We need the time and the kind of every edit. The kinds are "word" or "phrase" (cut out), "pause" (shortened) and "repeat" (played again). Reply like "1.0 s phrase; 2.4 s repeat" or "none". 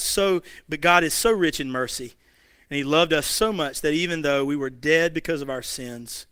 none